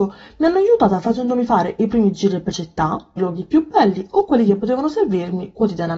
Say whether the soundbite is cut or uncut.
cut